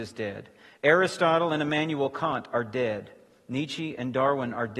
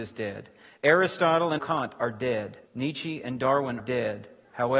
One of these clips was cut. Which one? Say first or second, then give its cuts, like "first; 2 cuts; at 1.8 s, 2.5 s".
second; 3 cuts; at 1.6 s, 2.7 s, 3.8 s